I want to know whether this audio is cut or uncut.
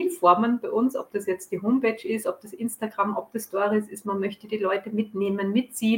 uncut